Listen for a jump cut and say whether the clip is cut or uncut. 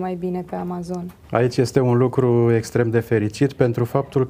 cut